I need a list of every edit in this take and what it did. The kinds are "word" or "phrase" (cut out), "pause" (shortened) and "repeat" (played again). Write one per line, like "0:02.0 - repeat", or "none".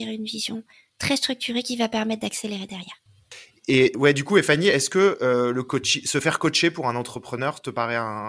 none